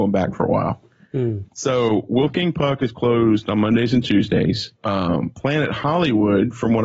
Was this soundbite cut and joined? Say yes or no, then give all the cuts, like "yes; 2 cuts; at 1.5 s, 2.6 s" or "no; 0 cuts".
yes; 2 cuts; at 1.5 s, 4.8 s